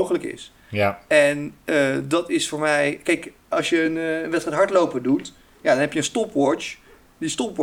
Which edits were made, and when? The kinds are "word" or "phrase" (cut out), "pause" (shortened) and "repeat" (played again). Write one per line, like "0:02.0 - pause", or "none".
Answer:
none